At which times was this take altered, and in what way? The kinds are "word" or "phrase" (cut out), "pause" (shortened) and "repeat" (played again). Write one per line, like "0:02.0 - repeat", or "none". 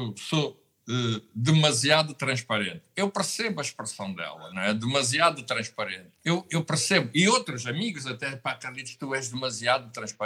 0:06.1 - pause